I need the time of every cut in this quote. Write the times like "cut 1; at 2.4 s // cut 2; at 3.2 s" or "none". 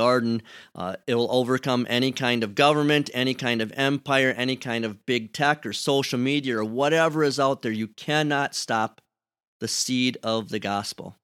none